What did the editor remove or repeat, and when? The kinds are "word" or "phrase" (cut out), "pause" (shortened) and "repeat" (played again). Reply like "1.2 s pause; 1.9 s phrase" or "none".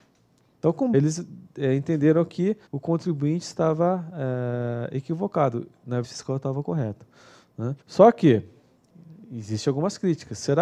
0.9 s phrase; 2.7 s pause; 6.0 s phrase; 7.8 s pause